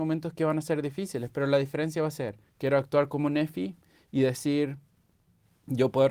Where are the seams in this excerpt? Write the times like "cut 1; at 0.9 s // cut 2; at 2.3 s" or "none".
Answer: cut 1; at 2.5 s